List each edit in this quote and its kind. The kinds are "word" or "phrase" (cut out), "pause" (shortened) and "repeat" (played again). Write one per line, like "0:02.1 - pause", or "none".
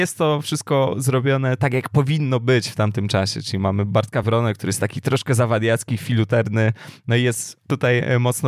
none